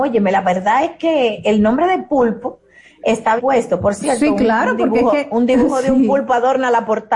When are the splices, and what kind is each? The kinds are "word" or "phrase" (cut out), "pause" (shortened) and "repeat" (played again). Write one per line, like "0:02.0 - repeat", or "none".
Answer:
0:03.4 - word